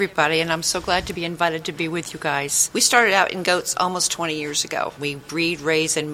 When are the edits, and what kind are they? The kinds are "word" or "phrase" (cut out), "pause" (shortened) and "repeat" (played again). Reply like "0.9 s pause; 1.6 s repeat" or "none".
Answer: 1.2 s phrase